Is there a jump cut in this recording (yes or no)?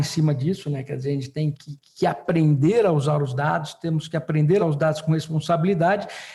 yes